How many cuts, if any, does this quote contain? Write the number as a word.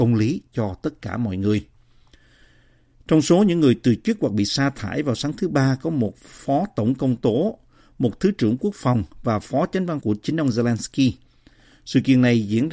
one